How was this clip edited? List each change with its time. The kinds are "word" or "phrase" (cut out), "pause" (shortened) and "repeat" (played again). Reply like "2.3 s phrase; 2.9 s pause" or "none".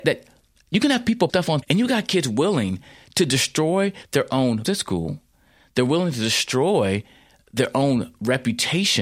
1.3 s word; 1.6 s word; 4.6 s word